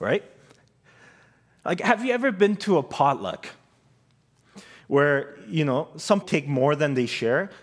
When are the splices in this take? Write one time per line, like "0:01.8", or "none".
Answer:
0:06.2

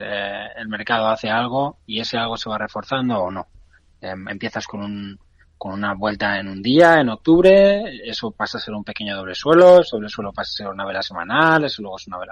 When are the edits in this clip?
none

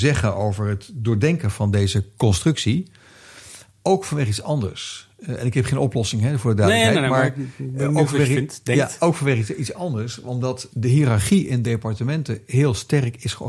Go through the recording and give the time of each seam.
0:10.7

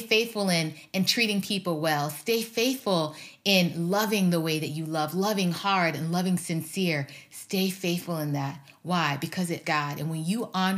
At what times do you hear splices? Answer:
0:09.6

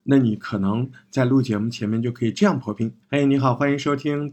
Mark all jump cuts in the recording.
0:03.0

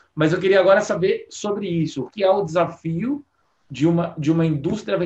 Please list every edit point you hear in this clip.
0:02.1

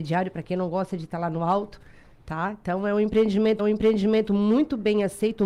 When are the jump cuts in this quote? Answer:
0:03.6

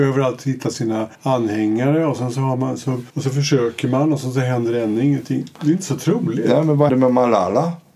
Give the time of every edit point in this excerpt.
0:01.1
0:03.1
0:06.9

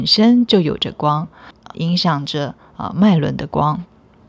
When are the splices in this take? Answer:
0:01.7

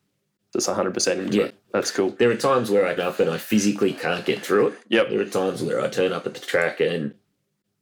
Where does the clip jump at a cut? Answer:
0:03.0

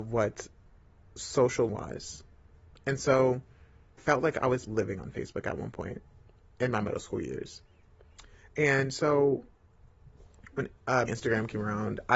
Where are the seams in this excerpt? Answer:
0:01.7
0:04.0
0:04.7
0:11.1

